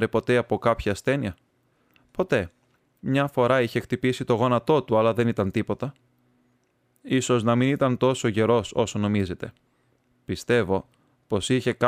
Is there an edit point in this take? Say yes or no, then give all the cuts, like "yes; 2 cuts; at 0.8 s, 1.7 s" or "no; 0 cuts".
no; 0 cuts